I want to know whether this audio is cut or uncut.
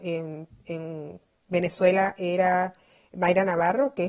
uncut